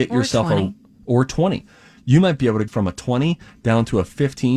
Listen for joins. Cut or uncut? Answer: cut